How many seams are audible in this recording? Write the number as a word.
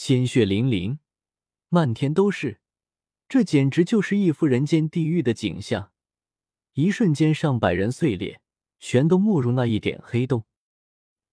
zero